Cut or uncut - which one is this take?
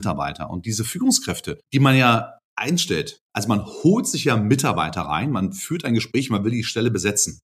cut